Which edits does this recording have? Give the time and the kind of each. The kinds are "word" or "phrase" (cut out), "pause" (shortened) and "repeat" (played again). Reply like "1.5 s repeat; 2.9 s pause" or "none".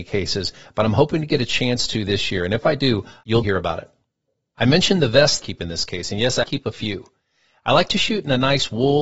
3.4 s word; 5.4 s phrase; 6.4 s word